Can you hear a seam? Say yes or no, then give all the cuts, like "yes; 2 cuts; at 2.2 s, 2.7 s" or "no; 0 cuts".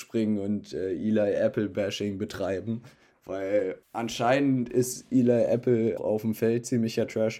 yes; 2 cuts; at 3.8 s, 6.0 s